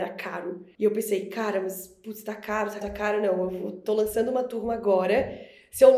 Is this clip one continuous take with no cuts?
no; 1 cut; at 2.8 s

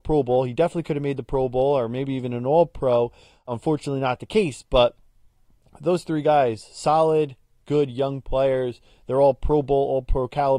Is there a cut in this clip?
no; 0 cuts

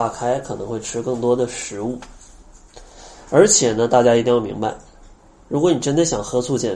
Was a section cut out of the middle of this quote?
no; 0 cuts

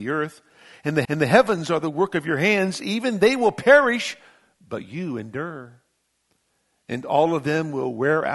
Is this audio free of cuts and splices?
no; 1 cut; at 1.0 s

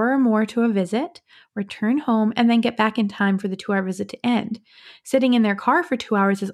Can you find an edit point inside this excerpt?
no; 0 cuts

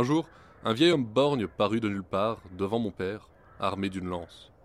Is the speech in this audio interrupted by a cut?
no; 0 cuts

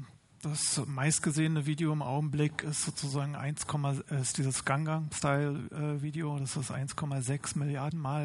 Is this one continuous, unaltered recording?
yes; 0 cuts

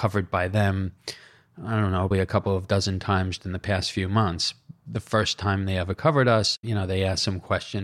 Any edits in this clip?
yes; 2 cuts; at 2.1 s, 3.4 s

